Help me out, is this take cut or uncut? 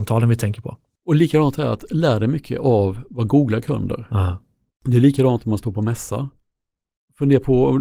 uncut